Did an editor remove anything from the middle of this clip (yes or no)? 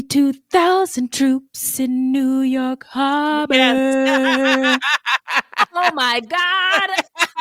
no